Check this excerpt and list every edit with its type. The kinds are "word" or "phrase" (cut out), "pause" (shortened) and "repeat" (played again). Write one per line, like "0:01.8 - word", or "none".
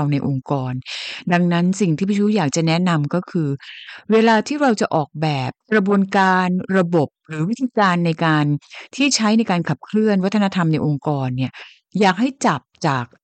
0:05.6 - pause